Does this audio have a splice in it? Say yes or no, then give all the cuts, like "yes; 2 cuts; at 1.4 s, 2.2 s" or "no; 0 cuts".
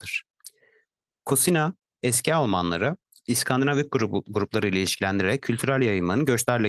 no; 0 cuts